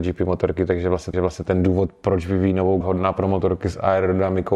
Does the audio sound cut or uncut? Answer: cut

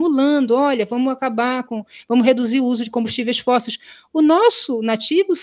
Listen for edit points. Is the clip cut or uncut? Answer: uncut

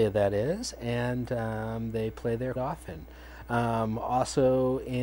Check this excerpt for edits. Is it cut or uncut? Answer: cut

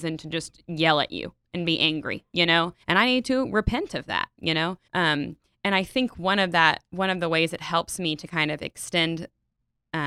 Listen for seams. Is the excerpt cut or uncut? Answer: cut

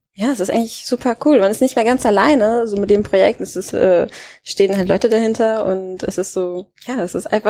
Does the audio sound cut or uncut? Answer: cut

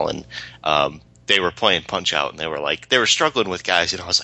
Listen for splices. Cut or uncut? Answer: uncut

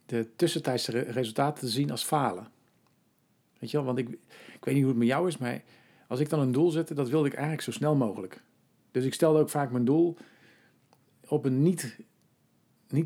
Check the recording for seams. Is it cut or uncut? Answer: uncut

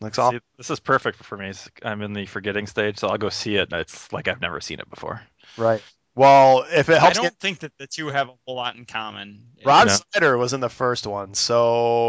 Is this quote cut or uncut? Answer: uncut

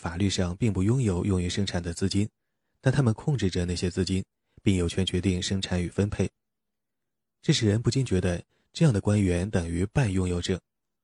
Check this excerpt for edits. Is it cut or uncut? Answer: uncut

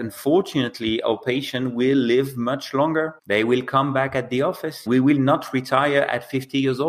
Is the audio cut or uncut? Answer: cut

